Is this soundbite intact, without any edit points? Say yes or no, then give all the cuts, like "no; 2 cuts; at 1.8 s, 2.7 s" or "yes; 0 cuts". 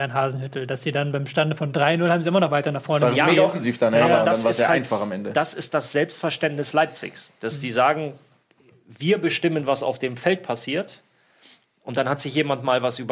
yes; 0 cuts